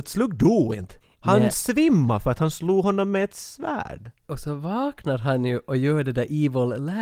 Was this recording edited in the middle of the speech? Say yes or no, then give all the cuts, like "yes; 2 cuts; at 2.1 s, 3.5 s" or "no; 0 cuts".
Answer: yes; 1 cut; at 1.0 s